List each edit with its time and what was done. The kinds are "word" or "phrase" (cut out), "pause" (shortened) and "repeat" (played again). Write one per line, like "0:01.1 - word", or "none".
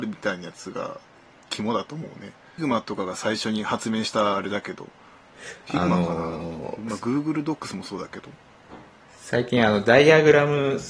0:02.6 - phrase